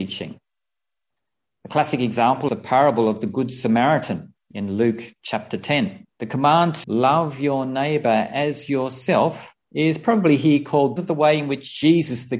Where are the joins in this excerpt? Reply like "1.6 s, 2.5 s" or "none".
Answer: 2.5 s, 6.1 s, 6.8 s, 9.6 s, 11.0 s